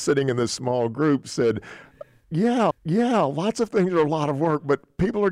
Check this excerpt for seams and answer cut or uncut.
cut